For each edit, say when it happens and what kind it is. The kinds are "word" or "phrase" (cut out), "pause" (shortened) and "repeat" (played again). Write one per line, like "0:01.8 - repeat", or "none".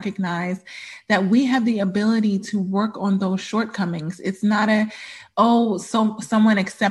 none

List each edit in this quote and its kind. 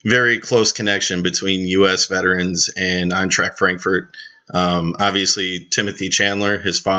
none

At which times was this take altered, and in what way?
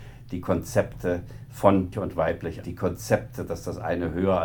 0:01.9 - word
0:02.6 - word

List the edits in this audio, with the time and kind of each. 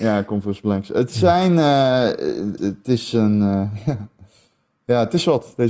0:02.6 - word

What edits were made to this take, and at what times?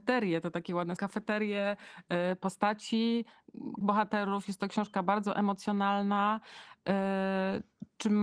0:01.0 - word
0:03.8 - word

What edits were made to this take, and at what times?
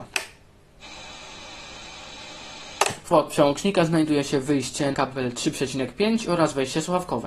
0:03.1 - word
0:04.9 - word

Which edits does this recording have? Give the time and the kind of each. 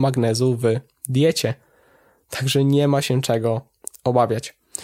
none

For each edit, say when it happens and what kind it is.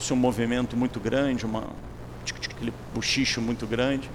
0:02.5 - word

